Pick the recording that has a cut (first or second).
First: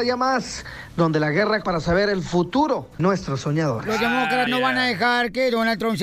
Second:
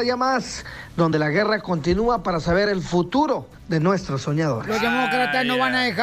first